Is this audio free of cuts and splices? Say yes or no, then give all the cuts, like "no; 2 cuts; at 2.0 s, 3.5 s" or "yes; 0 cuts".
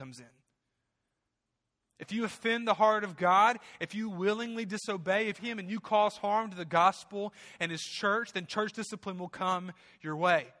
no; 1 cut; at 5.4 s